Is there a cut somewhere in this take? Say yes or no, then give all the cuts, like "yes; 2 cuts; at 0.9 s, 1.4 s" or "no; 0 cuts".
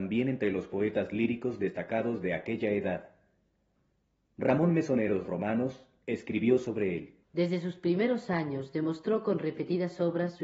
yes; 1 cut; at 7.2 s